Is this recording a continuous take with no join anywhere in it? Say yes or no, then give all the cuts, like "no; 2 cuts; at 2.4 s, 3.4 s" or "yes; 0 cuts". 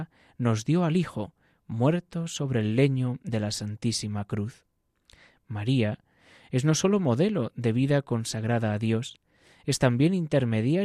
yes; 0 cuts